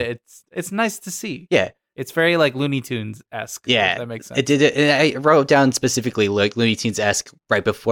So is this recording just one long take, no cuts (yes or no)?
yes